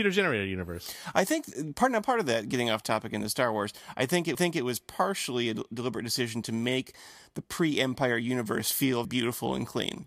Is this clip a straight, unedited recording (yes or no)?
no